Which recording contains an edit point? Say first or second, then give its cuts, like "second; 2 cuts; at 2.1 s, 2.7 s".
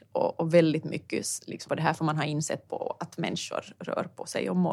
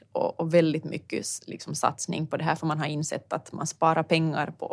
first; 2 cuts; at 1.7 s, 2.7 s